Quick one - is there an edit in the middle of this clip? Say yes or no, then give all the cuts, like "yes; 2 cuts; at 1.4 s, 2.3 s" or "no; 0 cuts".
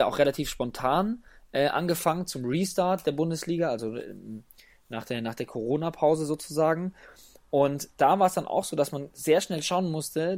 no; 0 cuts